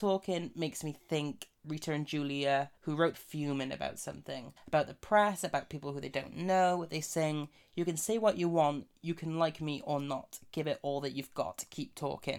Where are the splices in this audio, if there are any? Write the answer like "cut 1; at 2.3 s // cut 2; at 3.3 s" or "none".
cut 1; at 2.8 s // cut 2; at 3.1 s // cut 3; at 4.6 s